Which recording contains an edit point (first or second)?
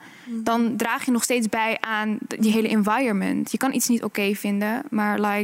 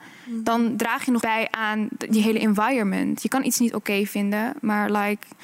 second